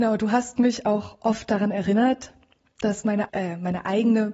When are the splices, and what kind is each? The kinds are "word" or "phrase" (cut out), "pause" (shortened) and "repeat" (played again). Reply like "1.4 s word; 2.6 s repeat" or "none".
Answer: 3.3 s word